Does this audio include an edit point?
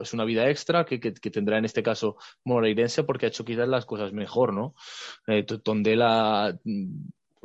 no; 0 cuts

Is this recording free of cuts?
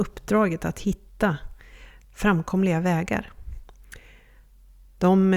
yes; 0 cuts

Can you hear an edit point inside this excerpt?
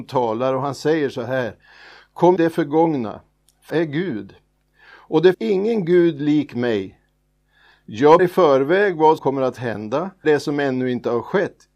yes; 6 cuts; at 2.4 s, 3.7 s, 5.3 s, 8.2 s, 9.2 s, 10.2 s

